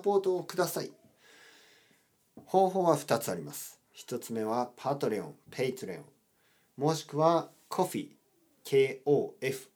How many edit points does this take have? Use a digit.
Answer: 0